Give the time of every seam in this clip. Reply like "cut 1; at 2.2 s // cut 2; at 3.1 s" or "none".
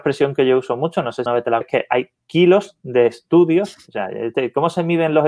cut 1; at 1.3 s // cut 2; at 1.6 s